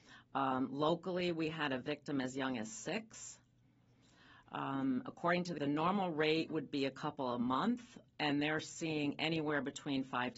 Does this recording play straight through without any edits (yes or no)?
no